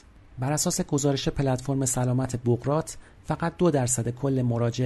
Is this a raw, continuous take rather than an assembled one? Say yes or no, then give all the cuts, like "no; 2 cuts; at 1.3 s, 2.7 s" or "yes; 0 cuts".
yes; 0 cuts